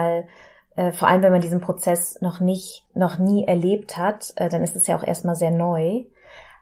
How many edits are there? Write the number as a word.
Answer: one